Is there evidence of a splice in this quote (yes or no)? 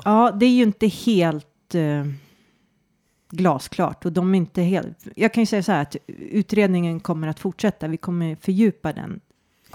no